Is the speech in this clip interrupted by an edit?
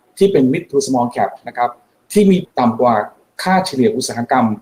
yes; 1 cut; at 2.4 s

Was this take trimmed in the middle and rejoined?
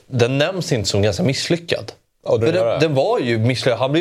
yes; 1 cut; at 2.4 s

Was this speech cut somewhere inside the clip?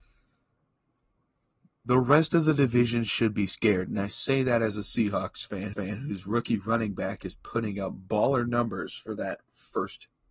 yes; 1 cut; at 5.7 s

